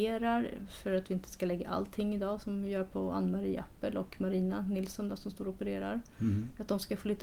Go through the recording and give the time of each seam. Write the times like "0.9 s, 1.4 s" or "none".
none